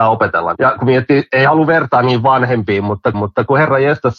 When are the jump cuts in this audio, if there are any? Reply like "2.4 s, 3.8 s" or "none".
3.1 s